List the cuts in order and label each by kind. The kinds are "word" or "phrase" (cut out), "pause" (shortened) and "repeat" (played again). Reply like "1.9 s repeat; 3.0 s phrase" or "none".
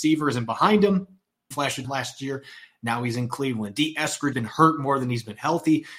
1.5 s phrase; 1.8 s word; 4.3 s word